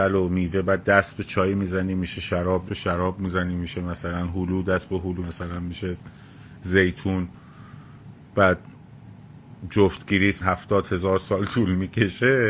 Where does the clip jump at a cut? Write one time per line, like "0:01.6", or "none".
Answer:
0:02.7
0:05.2
0:10.4